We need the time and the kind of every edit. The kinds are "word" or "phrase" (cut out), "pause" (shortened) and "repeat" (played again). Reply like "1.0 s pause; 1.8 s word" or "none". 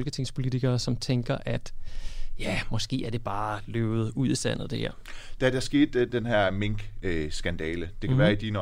none